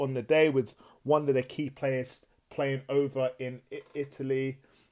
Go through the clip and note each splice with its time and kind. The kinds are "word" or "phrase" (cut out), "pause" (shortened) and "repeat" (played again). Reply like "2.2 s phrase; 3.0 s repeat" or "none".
none